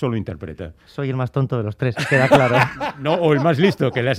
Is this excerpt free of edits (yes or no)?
yes